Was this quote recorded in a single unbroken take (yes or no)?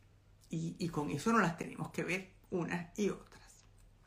no